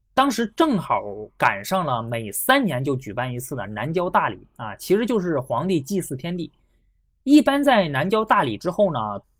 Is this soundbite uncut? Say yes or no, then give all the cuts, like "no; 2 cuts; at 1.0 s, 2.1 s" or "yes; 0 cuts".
yes; 0 cuts